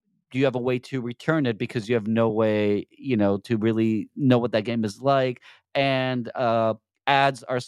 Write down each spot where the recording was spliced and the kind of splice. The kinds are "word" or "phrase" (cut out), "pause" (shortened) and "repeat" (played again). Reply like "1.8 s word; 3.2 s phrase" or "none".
none

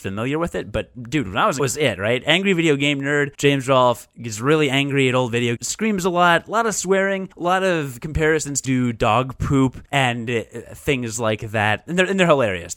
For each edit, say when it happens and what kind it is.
1.6 s phrase; 3.3 s pause; 5.6 s phrase; 7.3 s pause; 8.6 s word; 9.9 s pause

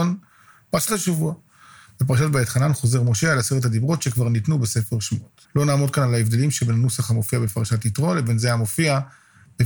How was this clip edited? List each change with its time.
5.4 s pause

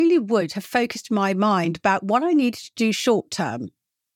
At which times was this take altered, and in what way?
none

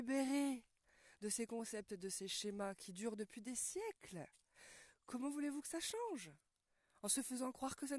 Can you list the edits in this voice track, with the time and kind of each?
none

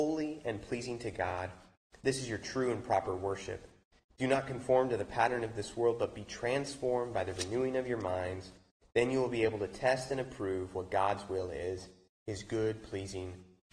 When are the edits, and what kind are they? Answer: none

